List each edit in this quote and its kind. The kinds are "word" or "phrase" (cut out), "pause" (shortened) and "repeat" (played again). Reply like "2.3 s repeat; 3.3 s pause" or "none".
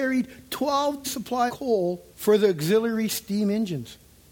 1.0 s word; 1.5 s word; 2.1 s pause